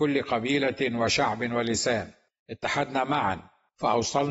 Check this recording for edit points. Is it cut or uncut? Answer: uncut